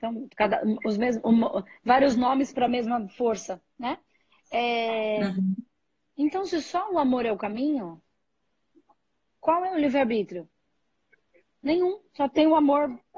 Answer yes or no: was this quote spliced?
no